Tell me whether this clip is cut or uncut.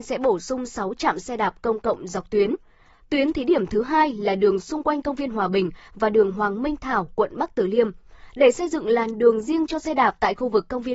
uncut